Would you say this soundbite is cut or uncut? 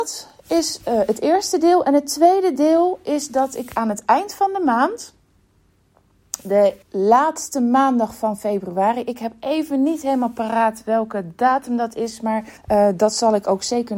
cut